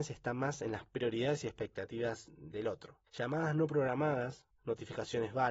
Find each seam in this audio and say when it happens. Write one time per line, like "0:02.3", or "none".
0:03.1